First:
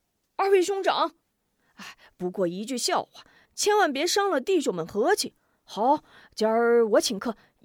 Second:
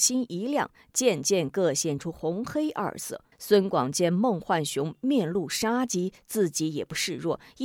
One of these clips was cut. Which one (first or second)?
second